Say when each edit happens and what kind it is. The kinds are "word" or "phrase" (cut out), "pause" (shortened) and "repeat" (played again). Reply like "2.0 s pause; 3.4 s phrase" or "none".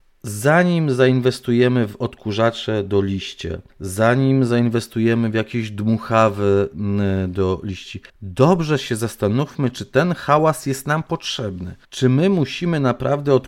3.7 s pause; 8.1 s pause; 11.8 s pause